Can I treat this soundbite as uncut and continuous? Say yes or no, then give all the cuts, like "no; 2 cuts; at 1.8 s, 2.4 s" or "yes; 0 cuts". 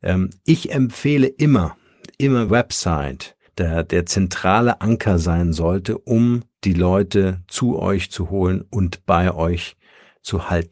no; 2 cuts; at 2.5 s, 3.5 s